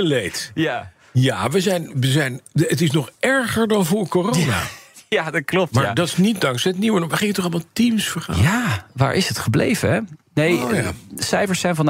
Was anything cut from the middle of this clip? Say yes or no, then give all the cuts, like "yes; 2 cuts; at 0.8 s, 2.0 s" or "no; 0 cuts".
no; 0 cuts